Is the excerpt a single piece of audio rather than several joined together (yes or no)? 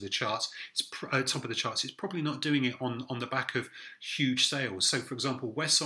yes